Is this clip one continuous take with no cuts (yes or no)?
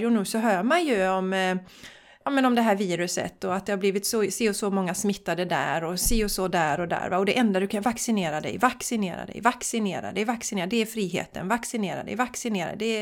no